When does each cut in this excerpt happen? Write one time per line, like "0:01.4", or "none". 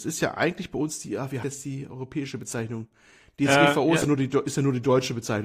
0:01.4